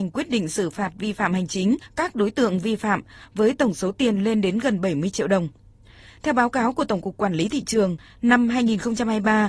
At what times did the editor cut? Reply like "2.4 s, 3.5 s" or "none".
none